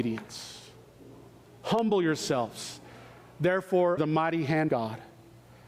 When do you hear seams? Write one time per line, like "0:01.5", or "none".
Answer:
0:04.0
0:04.7